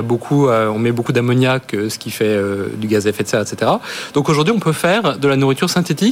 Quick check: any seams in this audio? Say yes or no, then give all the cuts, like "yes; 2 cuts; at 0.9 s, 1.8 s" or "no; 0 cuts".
no; 0 cuts